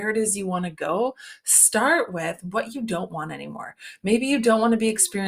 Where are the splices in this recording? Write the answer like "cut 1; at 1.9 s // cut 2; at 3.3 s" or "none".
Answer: none